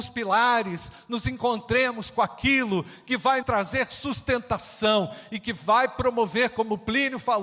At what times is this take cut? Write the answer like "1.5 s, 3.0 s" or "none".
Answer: 3.4 s